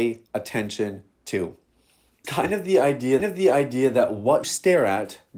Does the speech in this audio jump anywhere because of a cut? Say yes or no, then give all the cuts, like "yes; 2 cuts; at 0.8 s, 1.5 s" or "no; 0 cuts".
yes; 3 cuts; at 2.2 s, 3.2 s, 4.4 s